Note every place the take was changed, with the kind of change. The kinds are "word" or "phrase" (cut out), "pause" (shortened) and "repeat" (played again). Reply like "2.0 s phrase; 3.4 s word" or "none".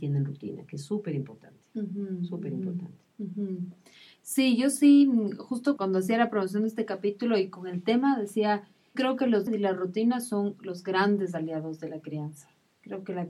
5.8 s word; 8.9 s word; 9.5 s word